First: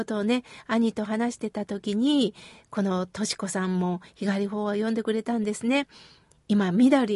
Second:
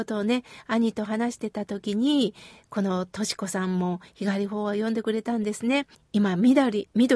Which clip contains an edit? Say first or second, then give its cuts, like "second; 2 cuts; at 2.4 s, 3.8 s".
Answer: second; 1 cut; at 5.9 s